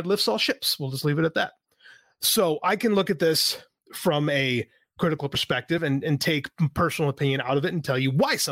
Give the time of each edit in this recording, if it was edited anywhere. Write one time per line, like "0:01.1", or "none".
none